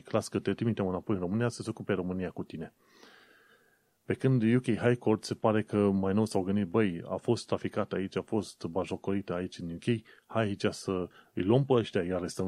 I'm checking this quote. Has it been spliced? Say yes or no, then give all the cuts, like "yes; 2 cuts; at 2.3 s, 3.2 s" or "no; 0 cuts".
no; 0 cuts